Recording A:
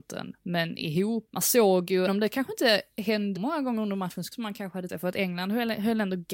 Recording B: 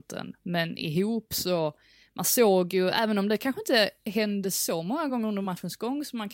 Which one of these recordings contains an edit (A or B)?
A